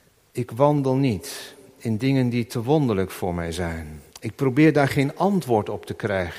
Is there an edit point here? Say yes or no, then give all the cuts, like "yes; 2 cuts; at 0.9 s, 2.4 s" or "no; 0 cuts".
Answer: yes; 1 cut; at 4.1 s